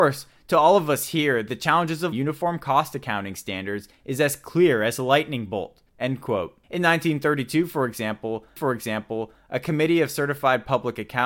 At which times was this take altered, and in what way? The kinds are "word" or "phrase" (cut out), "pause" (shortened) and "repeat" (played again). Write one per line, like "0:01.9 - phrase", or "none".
0:02.1 - word
0:05.9 - pause
0:06.6 - pause
0:08.6 - repeat